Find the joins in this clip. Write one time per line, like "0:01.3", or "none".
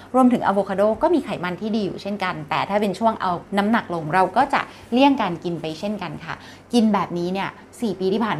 0:03.5